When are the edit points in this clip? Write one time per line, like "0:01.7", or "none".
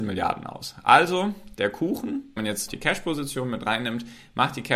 0:01.5
0:02.4
0:02.7